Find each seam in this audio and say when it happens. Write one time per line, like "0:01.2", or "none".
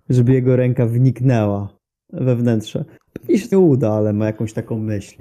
0:03.5